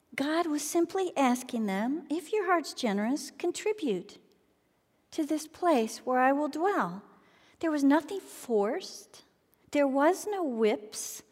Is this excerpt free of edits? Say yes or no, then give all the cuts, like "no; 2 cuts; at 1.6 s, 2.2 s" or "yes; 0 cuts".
yes; 0 cuts